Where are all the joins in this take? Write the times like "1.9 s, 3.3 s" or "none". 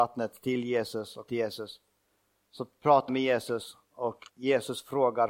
1.3 s, 3.1 s, 4.3 s